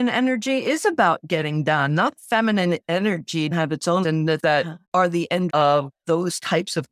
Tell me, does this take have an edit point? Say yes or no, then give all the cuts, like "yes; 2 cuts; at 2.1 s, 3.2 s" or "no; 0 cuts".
yes; 6 cuts; at 2.2 s, 3.5 s, 4.0 s, 4.4 s, 4.8 s, 5.5 s